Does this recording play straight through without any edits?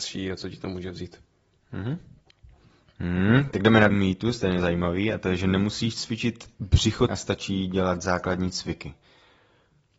no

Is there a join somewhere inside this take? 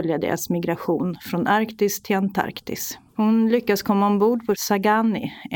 yes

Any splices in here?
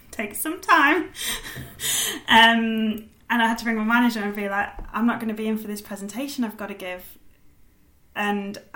no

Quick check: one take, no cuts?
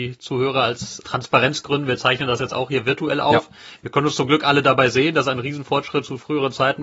no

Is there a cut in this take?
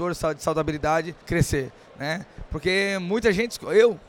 yes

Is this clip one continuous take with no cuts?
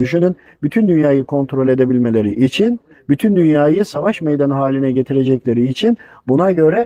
yes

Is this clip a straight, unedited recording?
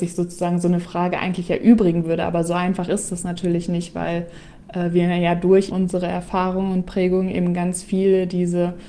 no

